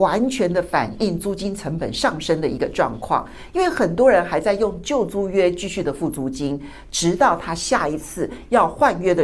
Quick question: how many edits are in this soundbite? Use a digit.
0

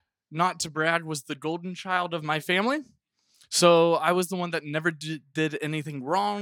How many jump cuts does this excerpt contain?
0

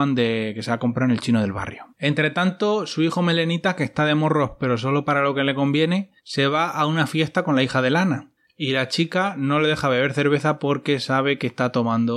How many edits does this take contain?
3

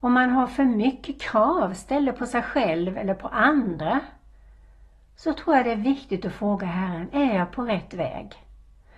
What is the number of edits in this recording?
0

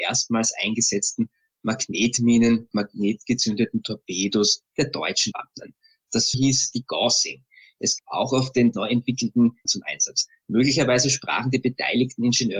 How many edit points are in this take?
6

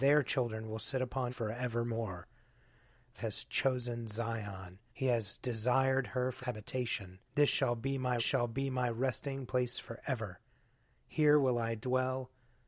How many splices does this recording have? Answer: 6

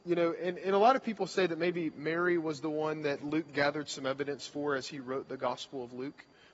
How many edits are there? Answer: 0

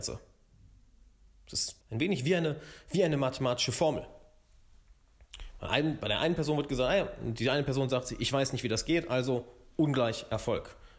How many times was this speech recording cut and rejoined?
1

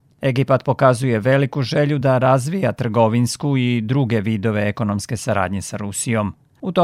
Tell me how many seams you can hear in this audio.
0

